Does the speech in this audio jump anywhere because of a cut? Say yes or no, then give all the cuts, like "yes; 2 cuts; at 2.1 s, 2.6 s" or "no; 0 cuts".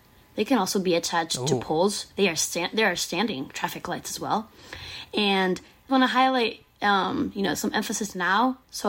yes; 1 cut; at 5.9 s